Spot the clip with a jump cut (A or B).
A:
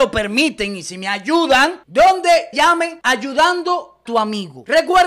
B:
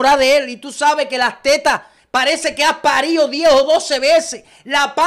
A